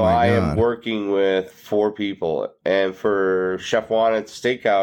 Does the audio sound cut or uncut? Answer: uncut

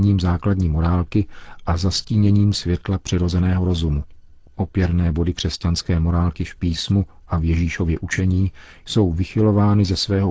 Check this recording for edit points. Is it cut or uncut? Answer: uncut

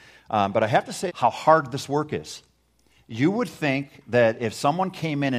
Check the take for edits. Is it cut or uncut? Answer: cut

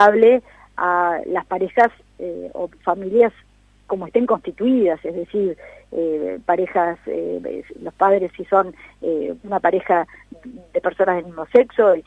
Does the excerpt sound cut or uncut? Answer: uncut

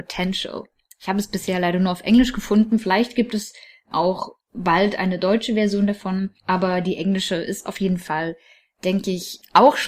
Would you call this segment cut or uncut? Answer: cut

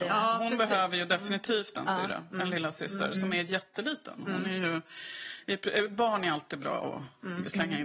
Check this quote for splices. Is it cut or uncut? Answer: uncut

